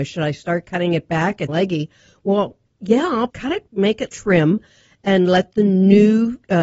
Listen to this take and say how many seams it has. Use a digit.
4